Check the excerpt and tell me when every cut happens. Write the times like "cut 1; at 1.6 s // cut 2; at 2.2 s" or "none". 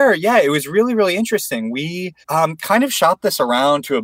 cut 1; at 2.2 s